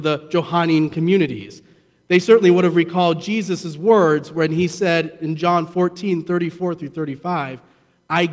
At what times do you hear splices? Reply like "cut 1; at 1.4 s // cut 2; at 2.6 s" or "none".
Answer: none

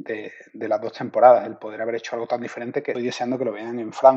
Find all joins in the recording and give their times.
cut 1; at 2.9 s

